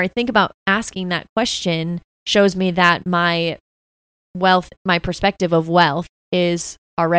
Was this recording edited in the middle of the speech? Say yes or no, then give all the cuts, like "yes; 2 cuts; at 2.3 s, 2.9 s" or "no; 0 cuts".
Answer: yes; 1 cut; at 4.7 s